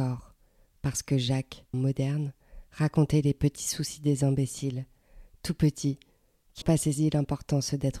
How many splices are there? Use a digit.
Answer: 2